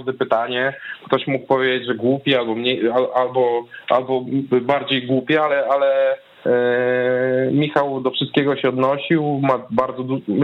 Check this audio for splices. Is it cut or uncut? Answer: uncut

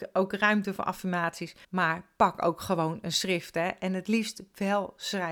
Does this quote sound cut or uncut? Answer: cut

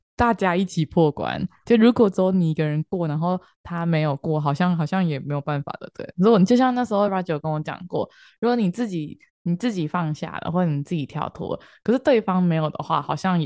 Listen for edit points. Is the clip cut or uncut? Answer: uncut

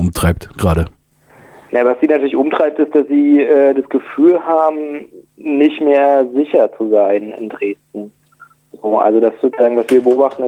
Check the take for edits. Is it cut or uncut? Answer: uncut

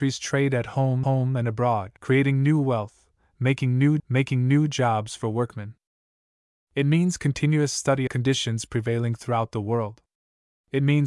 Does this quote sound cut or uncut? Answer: cut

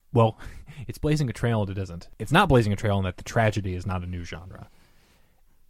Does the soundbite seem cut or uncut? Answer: uncut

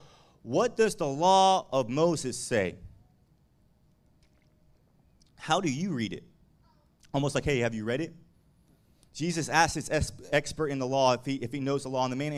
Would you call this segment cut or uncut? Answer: uncut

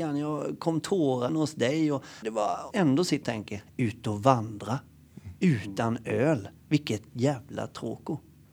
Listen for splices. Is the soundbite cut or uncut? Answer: cut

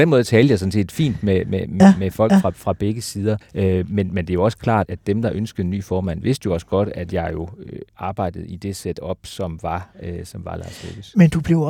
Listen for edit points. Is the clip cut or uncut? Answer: cut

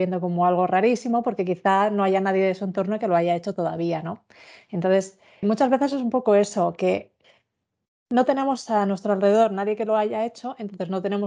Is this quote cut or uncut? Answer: cut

